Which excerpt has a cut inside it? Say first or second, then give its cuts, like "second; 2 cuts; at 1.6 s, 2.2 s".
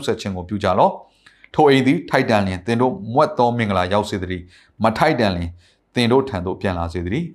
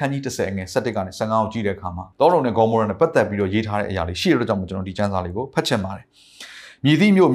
second; 1 cut; at 2.1 s